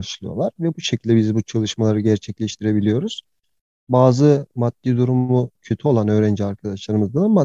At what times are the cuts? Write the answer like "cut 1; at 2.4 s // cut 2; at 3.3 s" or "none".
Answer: none